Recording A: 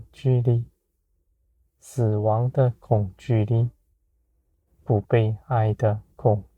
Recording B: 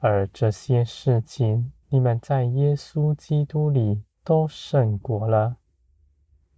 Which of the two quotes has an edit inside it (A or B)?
B